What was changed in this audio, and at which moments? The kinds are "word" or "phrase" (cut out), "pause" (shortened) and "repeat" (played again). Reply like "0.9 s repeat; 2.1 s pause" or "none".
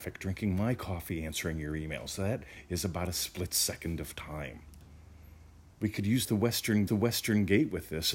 5.7 s pause; 6.9 s repeat